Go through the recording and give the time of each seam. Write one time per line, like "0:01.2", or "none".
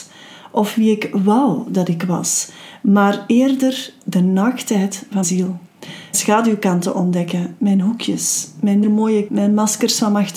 0:05.2
0:06.1
0:08.8
0:09.3